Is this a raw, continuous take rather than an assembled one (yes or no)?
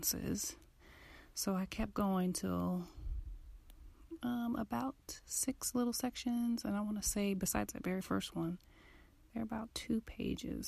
yes